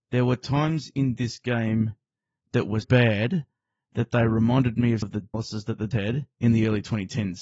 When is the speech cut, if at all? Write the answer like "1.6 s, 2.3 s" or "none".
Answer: 2.8 s, 5.0 s, 5.3 s, 5.9 s